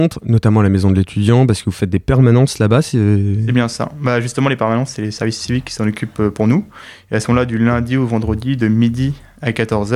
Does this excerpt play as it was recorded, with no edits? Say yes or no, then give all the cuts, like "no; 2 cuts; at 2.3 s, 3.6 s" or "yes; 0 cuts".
yes; 0 cuts